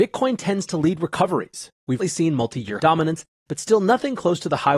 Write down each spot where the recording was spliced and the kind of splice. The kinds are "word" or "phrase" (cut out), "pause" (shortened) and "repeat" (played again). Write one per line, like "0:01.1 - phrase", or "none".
0:02.0 - word
0:02.8 - phrase